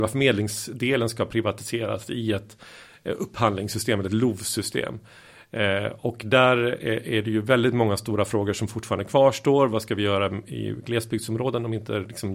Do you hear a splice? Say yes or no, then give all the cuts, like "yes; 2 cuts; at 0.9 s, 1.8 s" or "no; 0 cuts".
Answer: no; 0 cuts